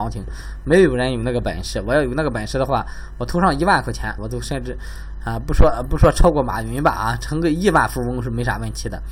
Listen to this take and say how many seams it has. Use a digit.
1